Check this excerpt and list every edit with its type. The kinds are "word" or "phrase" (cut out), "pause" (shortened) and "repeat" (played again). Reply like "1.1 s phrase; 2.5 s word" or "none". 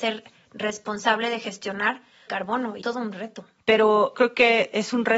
2.3 s phrase; 2.8 s word; 4.1 s word